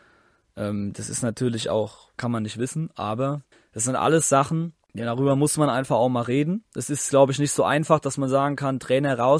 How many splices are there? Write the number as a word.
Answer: three